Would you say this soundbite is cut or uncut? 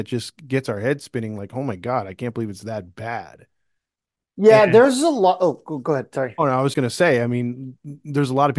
cut